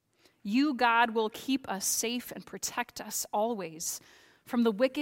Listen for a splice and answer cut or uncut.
uncut